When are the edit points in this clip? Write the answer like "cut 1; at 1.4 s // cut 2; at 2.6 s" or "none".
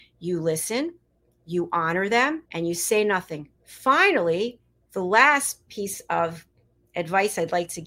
cut 1; at 2.5 s // cut 2; at 3.5 s